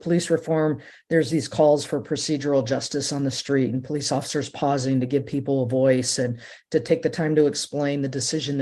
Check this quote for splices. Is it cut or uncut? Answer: uncut